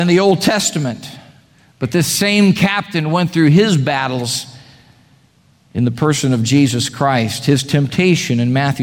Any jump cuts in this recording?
no; 0 cuts

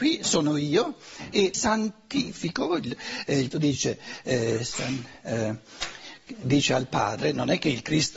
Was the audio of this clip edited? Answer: yes; 3 cuts; at 1.5 s, 3.5 s, 5.2 s

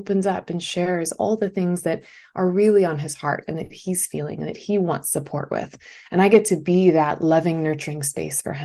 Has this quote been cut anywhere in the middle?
no; 0 cuts

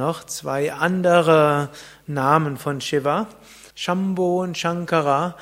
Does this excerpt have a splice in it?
yes; 1 cut; at 3.7 s

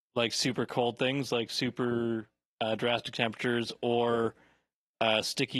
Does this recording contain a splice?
no; 0 cuts

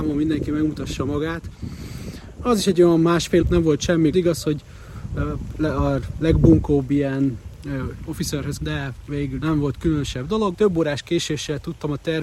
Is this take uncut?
no; 5 cuts; at 3.4 s, 4.1 s, 8.6 s, 9.4 s, 10.5 s

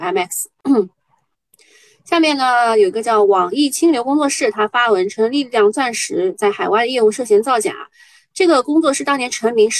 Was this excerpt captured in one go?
yes; 0 cuts

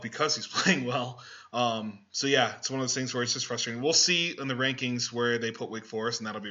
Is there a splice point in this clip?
no; 0 cuts

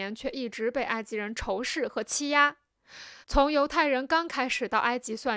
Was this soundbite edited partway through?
yes; 1 cut; at 3.2 s

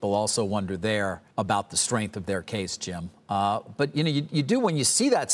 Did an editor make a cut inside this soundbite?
yes; 1 cut; at 1.3 s

